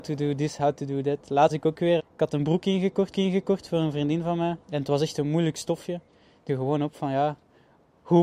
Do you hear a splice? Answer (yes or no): yes